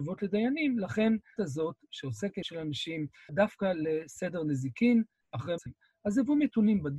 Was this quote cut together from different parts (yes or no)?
yes